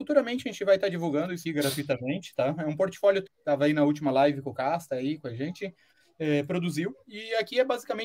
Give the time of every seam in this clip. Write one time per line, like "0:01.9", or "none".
0:01.4
0:03.3